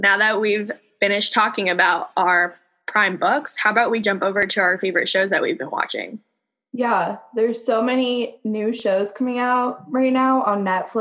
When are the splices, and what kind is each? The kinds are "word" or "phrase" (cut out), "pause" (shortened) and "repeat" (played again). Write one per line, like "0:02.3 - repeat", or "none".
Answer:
none